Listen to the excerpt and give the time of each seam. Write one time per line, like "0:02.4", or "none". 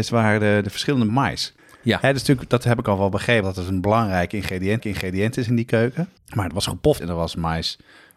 0:01.1
0:01.6
0:03.4
0:04.8
0:06.2
0:07.0